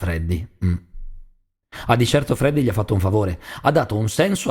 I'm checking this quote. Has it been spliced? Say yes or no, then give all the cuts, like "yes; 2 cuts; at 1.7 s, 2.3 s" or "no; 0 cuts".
no; 0 cuts